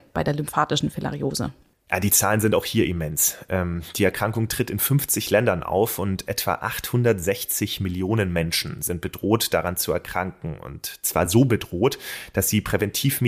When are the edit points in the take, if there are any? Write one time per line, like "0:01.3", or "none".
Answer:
none